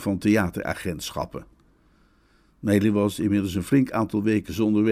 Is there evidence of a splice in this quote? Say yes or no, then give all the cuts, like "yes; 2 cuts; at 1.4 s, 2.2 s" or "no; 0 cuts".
no; 0 cuts